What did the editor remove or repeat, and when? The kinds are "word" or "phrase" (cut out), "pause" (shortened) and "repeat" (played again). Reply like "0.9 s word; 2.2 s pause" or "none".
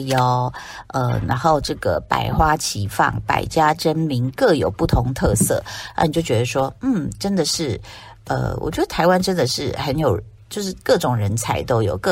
none

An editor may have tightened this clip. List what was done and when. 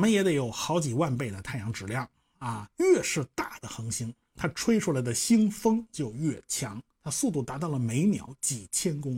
2.7 s pause

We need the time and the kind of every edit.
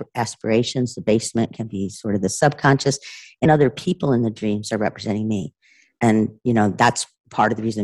3.5 s word

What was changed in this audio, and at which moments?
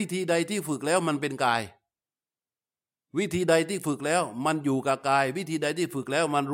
none

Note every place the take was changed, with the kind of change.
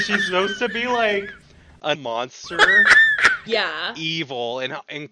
2.0 s word; 3.5 s phrase

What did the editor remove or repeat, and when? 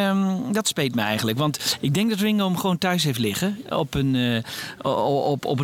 3.7 s word

